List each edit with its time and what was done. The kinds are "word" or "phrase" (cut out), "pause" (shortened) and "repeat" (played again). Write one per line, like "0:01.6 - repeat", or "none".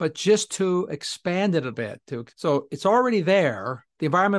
0:01.7 - word
0:02.3 - pause